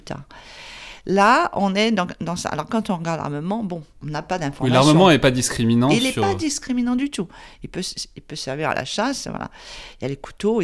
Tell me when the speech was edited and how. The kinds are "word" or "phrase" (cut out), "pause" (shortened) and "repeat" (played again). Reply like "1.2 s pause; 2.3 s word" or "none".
3.9 s pause